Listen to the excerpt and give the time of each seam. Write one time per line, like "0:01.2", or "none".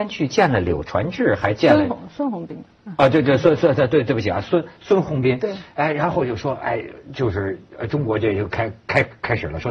none